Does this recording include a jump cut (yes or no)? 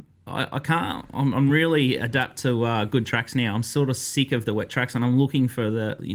no